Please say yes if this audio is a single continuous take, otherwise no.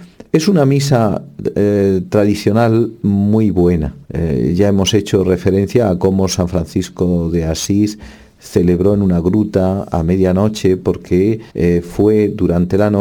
no